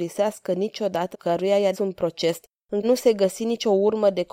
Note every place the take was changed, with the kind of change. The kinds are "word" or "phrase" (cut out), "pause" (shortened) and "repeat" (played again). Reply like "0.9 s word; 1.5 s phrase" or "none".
1.1 s word; 1.7 s word; 2.8 s word